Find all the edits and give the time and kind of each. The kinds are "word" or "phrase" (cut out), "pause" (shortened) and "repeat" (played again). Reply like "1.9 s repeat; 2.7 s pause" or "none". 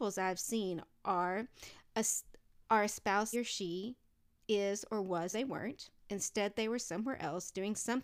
2.7 s pause; 3.3 s phrase; 5.3 s word; 6.0 s pause